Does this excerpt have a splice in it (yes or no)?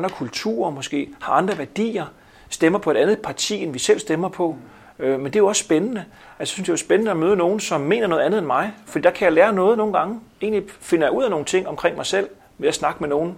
no